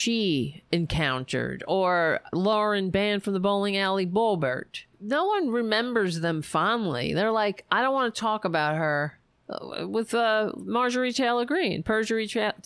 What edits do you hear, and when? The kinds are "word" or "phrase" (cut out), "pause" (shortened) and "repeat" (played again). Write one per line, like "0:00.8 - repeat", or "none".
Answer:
0:02.3 - phrase
0:04.9 - pause